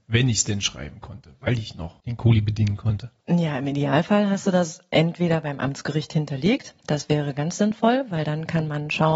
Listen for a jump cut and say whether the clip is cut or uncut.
cut